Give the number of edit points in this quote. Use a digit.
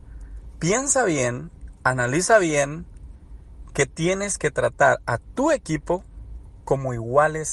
0